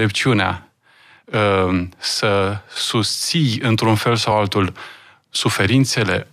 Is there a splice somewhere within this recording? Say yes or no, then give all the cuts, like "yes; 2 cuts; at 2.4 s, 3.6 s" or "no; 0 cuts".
no; 0 cuts